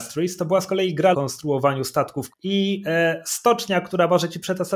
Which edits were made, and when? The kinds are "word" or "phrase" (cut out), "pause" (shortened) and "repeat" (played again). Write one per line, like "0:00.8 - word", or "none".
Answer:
0:01.1 - phrase
0:02.3 - word